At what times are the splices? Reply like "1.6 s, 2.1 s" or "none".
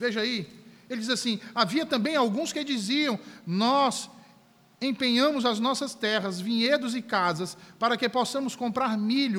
none